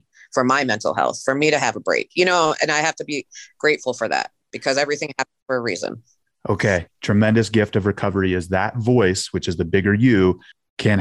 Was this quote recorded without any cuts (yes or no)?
yes